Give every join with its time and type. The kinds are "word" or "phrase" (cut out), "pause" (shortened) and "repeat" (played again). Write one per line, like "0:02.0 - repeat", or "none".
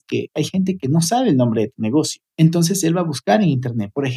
0:02.3 - pause